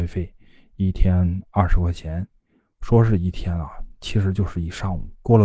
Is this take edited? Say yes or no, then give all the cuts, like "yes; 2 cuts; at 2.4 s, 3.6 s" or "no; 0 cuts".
no; 0 cuts